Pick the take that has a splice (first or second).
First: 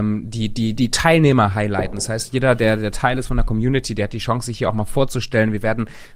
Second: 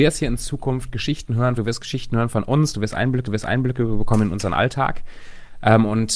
second